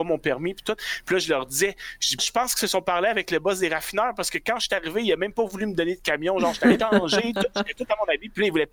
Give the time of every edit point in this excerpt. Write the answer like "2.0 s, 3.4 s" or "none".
2.2 s, 6.8 s